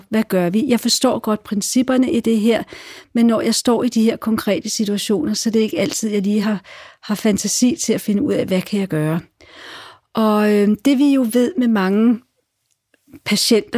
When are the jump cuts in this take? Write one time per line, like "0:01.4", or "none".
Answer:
none